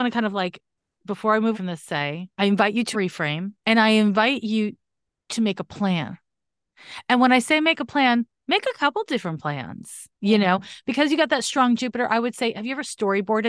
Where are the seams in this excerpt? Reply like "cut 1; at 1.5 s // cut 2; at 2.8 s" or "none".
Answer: cut 1; at 1.0 s // cut 2; at 1.5 s // cut 3; at 2.3 s // cut 4; at 2.9 s // cut 5; at 3.6 s // cut 6; at 10.1 s